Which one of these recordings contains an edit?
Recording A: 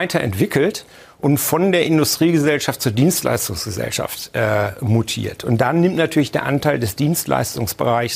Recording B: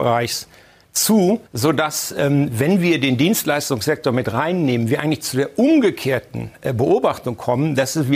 B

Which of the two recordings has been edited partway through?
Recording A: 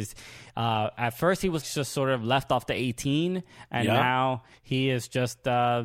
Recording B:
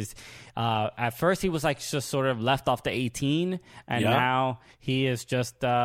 A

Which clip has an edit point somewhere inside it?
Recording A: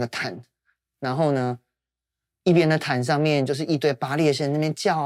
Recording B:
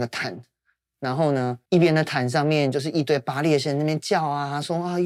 B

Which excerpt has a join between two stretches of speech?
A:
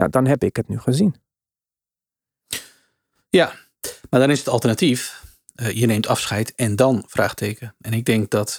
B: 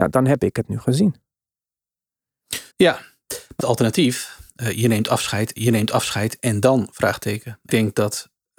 B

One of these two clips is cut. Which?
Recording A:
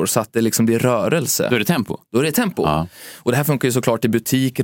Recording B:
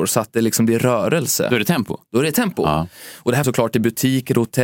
B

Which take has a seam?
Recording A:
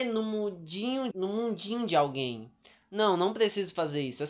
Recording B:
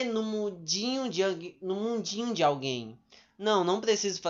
A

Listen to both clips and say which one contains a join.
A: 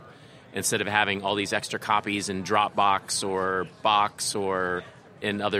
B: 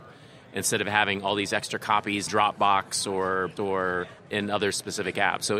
B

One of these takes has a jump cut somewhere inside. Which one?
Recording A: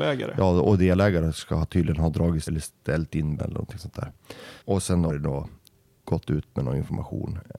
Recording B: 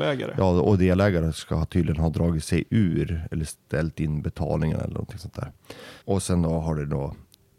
A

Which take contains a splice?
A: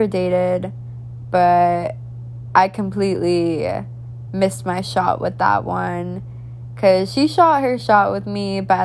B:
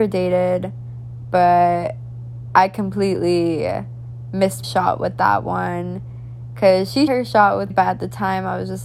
B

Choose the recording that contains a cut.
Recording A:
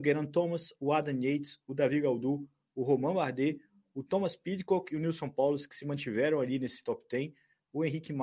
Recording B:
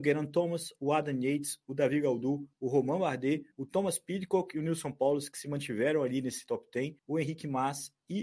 B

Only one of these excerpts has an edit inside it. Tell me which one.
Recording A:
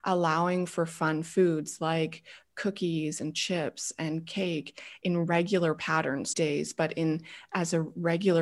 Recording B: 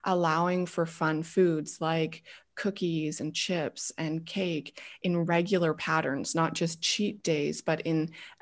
A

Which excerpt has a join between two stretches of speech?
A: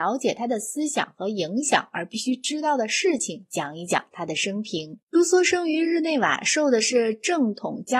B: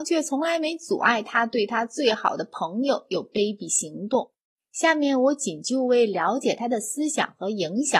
A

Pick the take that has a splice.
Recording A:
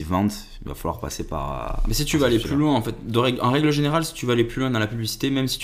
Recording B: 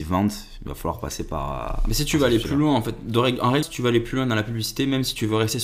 B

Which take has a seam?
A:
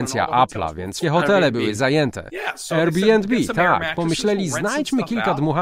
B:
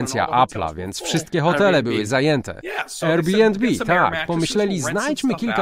A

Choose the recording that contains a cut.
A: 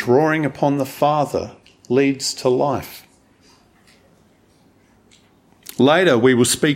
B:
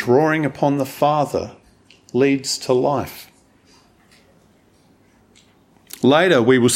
A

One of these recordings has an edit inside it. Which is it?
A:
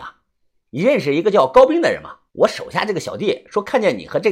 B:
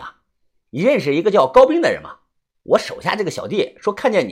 A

